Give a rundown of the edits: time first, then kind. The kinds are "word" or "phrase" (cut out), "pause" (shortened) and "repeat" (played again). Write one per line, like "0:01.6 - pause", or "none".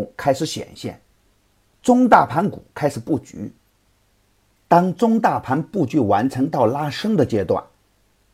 none

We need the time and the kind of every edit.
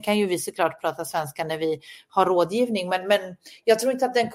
none

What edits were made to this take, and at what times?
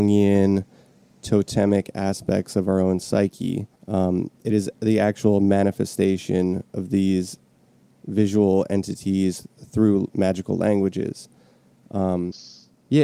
0:03.8 - pause

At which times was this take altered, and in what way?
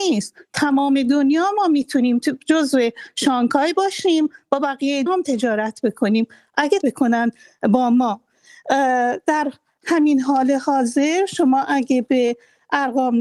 0:05.1 - word
0:06.8 - word

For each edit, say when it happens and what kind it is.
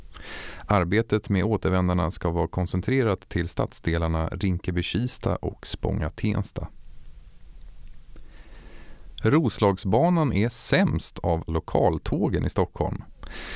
0:11.5 - word

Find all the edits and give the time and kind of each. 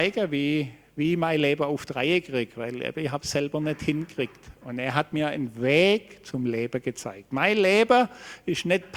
none

